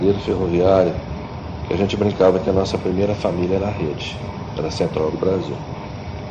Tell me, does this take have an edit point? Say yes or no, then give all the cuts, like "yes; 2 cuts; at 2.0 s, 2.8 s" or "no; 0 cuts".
no; 0 cuts